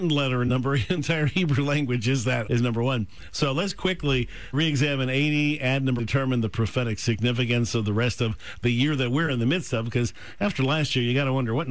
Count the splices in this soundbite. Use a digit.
4